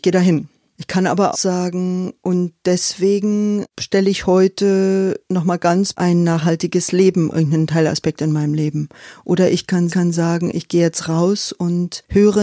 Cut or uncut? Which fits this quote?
cut